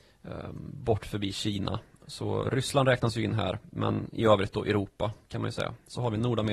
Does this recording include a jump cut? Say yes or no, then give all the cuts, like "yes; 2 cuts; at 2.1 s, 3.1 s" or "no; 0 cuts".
no; 0 cuts